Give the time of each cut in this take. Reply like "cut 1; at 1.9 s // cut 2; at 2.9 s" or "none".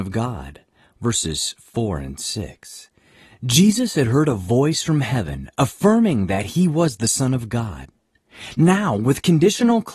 none